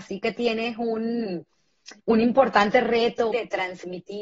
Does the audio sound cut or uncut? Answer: cut